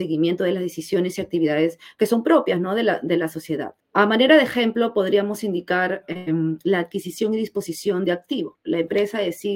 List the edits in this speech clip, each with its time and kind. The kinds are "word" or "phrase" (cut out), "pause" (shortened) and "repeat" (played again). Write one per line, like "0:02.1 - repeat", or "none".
none